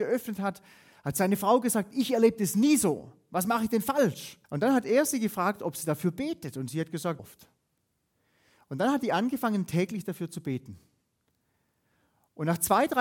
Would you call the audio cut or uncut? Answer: cut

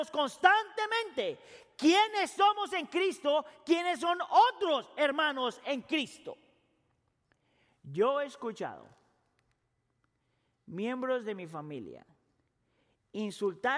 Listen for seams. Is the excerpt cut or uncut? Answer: uncut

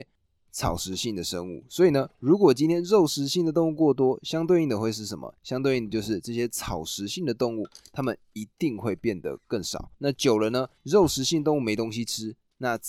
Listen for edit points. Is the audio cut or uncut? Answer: cut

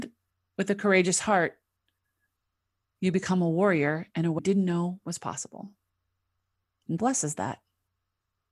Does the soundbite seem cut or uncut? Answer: cut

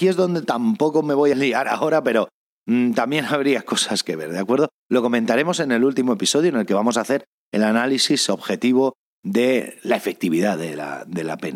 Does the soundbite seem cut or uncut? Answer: cut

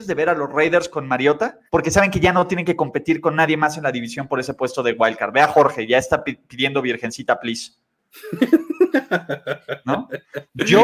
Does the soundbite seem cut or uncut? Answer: cut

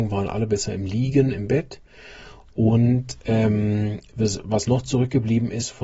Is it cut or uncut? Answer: uncut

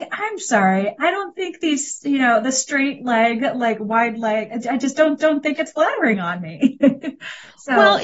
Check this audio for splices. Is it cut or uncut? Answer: cut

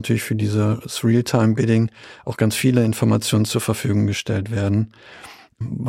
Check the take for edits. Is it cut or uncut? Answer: uncut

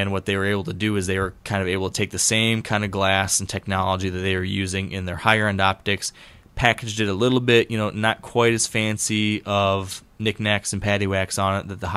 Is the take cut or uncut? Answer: uncut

